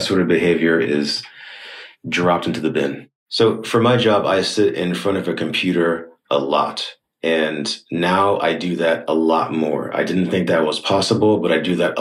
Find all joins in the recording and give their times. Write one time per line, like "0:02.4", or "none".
0:03.2